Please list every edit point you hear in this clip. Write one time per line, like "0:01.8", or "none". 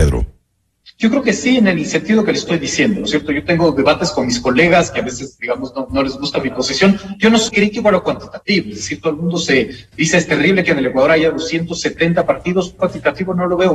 0:05.4
0:07.5
0:12.8

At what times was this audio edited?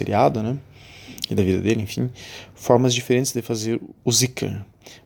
0:04.0

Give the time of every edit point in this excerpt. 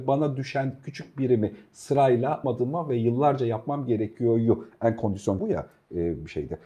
0:02.4
0:05.4

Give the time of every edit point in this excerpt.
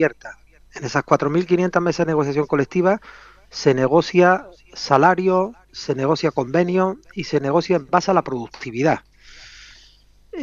none

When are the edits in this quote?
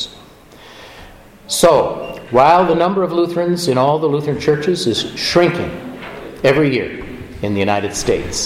none

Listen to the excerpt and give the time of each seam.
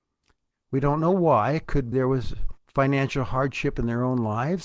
0:01.9
0:02.6

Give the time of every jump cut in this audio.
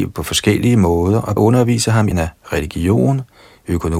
0:01.4
0:02.1

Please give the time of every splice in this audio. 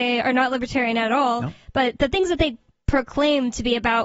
none

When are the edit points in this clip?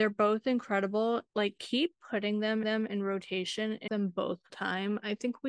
0:01.3
0:02.6
0:03.9
0:04.5

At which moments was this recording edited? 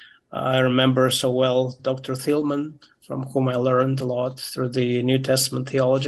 none

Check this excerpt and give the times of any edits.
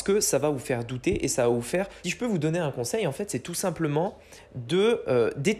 0:02.0

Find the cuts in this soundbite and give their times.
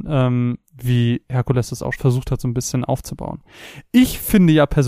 0:01.9

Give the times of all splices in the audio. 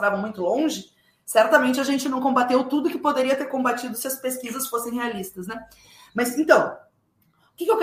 none

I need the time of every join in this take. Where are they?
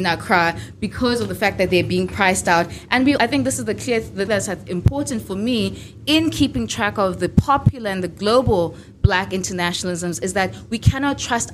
0:03.2
0:04.3

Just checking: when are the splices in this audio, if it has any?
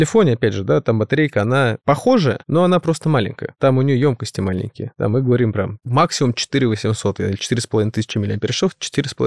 none

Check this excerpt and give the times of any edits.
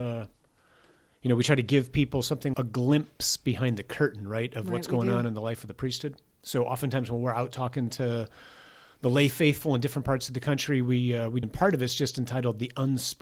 0:02.5
0:11.4

